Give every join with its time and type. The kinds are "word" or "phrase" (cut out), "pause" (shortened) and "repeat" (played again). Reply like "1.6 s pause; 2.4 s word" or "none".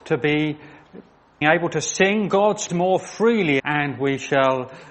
1.4 s word; 2.7 s word; 3.6 s word